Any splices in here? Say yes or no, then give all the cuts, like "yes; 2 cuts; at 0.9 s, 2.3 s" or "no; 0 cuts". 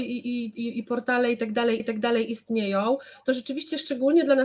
yes; 1 cut; at 1.8 s